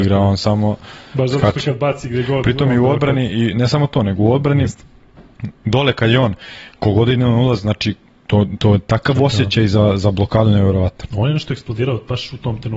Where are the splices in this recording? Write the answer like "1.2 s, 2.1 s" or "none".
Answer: none